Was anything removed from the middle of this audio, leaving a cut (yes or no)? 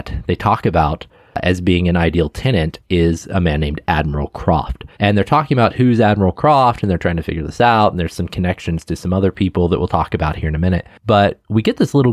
yes